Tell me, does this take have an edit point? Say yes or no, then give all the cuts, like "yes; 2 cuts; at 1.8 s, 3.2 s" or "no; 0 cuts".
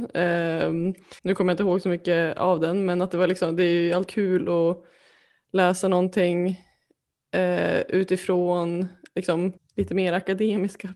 yes; 3 cuts; at 1.2 s, 4.1 s, 9.6 s